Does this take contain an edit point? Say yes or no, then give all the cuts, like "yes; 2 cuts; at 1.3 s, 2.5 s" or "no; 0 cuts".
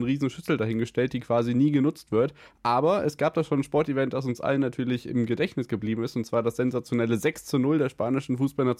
no; 0 cuts